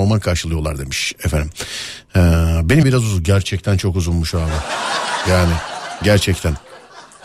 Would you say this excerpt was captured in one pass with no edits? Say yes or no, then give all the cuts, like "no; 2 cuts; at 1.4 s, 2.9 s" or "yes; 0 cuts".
no; 1 cut; at 2.8 s